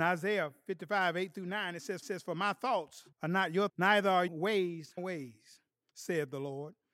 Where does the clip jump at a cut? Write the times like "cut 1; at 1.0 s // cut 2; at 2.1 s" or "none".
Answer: cut 1; at 2.0 s // cut 2; at 3.1 s // cut 3; at 3.7 s // cut 4; at 4.3 s // cut 5; at 5.0 s